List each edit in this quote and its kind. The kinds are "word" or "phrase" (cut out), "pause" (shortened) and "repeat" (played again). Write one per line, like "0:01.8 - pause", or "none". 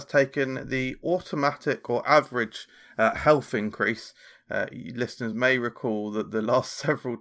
none